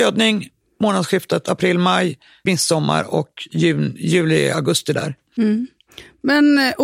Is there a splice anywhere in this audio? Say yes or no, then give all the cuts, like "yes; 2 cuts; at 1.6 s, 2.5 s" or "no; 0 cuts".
yes; 1 cut; at 2.5 s